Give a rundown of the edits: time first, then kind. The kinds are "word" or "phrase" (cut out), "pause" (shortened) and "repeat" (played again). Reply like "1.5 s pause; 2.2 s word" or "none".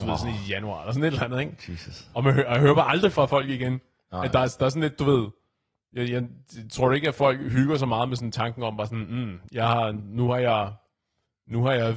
none